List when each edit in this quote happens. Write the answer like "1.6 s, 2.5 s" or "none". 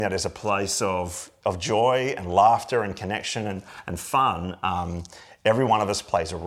none